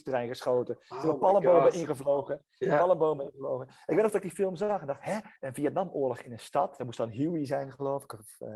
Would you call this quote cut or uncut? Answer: cut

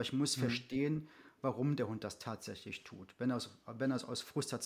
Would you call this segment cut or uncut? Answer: uncut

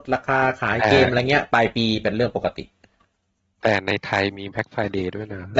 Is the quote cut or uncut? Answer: uncut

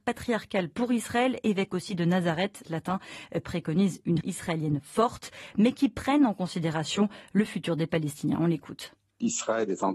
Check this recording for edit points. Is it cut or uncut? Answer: cut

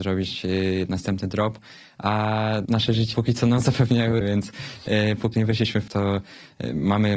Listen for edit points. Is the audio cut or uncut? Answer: cut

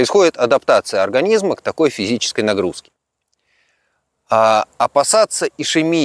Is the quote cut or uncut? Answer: uncut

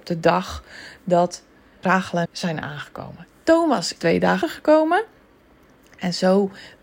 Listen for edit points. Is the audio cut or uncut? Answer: cut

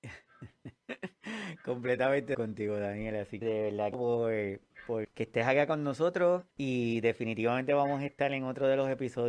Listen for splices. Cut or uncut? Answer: cut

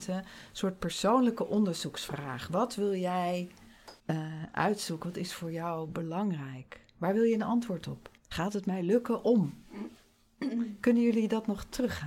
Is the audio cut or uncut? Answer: cut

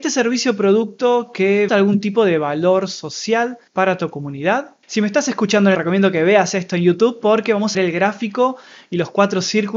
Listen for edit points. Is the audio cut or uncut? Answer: cut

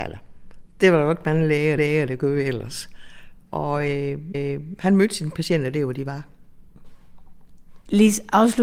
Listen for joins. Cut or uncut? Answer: cut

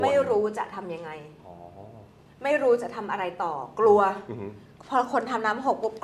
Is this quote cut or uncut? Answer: uncut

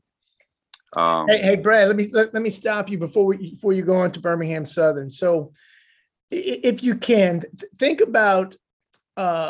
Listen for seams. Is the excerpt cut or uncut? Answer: uncut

